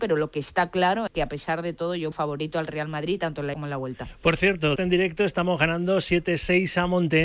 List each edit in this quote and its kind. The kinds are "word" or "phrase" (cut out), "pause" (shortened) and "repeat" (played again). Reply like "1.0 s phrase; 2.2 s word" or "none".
1.1 s word; 2.1 s word; 3.5 s word; 4.8 s word